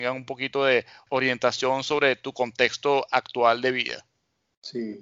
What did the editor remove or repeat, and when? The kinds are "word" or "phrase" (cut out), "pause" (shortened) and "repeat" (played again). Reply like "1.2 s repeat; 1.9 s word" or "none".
none

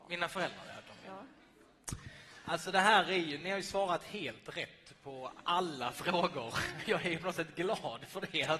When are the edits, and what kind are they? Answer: none

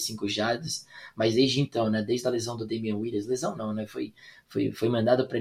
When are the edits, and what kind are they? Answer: none

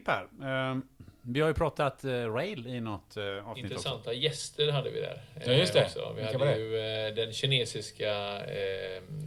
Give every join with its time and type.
none

